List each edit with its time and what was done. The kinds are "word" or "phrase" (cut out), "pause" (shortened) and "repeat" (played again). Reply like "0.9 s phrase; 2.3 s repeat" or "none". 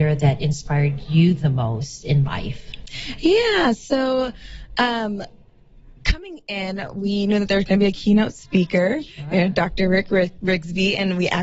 none